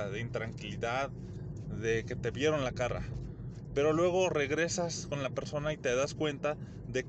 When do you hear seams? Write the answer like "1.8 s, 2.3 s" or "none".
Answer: none